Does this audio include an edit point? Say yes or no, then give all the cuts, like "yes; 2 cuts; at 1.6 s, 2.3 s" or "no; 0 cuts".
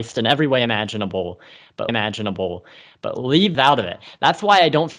yes; 2 cuts; at 1.9 s, 3.5 s